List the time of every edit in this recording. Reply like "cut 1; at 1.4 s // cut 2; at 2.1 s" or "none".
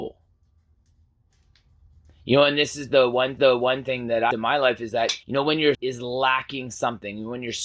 cut 1; at 3.4 s // cut 2; at 4.3 s // cut 3; at 5.2 s // cut 4; at 5.7 s